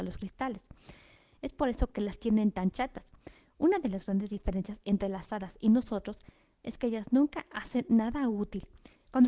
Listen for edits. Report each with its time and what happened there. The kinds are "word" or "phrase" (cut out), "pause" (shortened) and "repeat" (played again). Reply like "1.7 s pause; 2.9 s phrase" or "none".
none